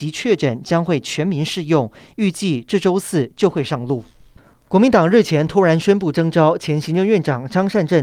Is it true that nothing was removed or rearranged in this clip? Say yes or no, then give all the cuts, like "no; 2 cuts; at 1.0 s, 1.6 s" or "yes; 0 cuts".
yes; 0 cuts